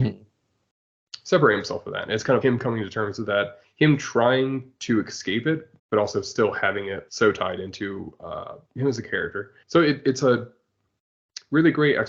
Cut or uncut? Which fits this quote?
cut